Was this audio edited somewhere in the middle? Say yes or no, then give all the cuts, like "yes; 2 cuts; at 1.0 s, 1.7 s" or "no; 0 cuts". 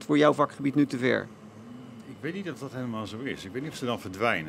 no; 0 cuts